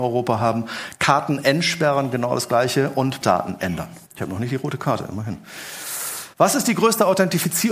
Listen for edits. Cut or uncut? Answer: cut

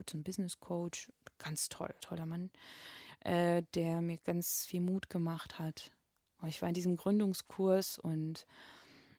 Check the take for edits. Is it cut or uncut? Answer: cut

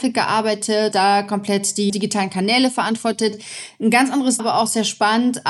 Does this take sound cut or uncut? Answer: cut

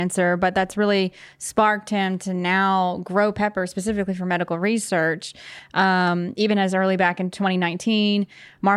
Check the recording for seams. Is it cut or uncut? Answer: uncut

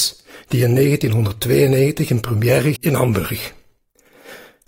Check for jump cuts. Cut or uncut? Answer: cut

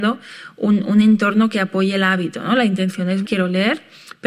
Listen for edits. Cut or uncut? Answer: cut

